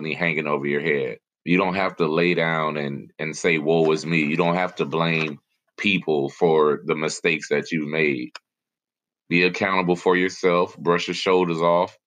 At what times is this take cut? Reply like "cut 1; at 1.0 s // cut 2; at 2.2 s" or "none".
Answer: cut 1; at 1.3 s